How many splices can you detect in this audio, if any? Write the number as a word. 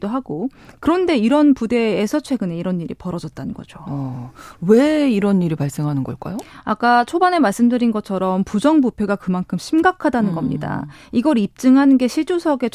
zero